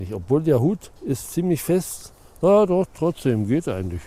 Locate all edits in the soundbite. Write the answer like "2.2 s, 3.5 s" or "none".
1.0 s